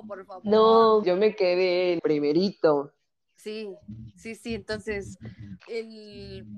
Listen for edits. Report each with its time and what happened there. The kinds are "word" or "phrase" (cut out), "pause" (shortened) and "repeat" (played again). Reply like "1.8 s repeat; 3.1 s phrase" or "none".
1.0 s word; 2.0 s word; 4.4 s word; 5.6 s phrase